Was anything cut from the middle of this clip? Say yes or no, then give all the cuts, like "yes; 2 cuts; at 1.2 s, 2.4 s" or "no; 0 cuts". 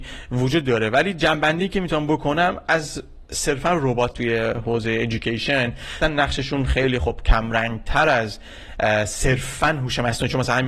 yes; 2 cuts; at 4.1 s, 6.0 s